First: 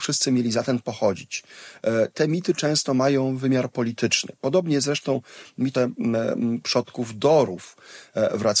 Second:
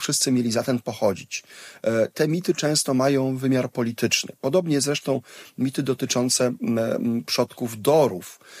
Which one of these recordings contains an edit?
first; 1 cut; at 5.8 s

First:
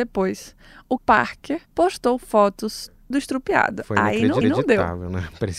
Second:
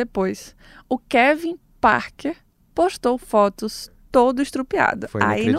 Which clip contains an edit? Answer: first; 4 cuts; at 1.0 s, 1.7 s, 3.1 s, 4.4 s

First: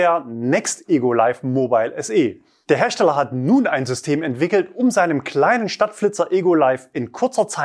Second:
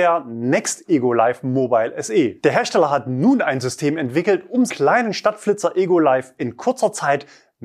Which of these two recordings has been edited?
second; 2 cuts; at 2.4 s, 4.7 s

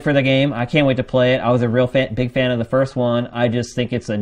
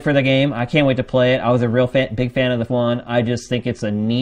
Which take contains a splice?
second; 1 cut; at 2.7 s

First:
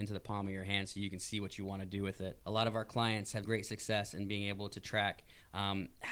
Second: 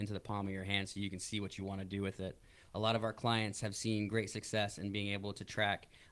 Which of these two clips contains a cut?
first; 2 cuts; at 2.4 s, 3.4 s

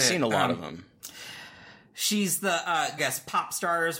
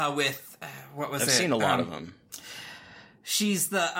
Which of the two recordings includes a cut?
first; 1 cut; at 3.0 s

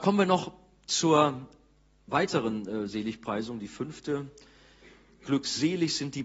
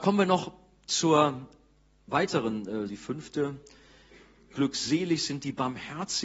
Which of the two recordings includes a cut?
second; 1 cut; at 2.9 s

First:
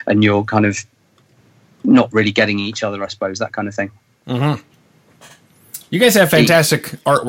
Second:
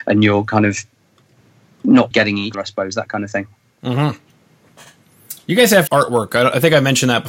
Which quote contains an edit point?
second; 3 cuts; at 2.1 s, 2.5 s, 5.9 s

